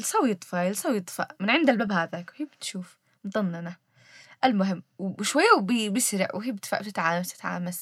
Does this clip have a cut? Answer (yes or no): no